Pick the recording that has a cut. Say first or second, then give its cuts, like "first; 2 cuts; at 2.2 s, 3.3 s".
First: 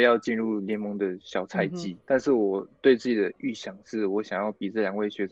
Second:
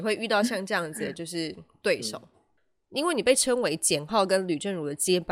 first; 1 cut; at 2.0 s